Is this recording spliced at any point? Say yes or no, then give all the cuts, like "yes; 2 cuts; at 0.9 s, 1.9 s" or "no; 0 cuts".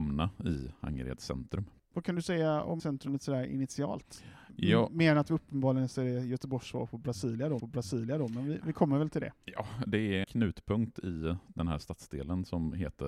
yes; 4 cuts; at 2.8 s, 7.6 s, 9.4 s, 10.2 s